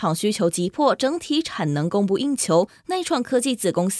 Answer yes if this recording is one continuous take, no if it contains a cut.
yes